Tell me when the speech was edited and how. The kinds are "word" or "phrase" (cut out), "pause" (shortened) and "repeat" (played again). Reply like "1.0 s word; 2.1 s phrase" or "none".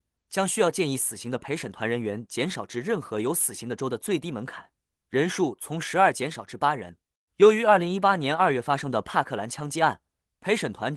none

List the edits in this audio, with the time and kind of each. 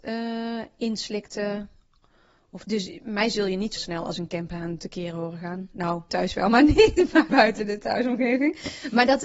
2.6 s word; 3.8 s word; 6.1 s word; 7.3 s word

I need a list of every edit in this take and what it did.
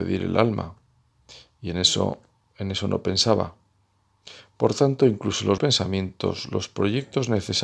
5.6 s word

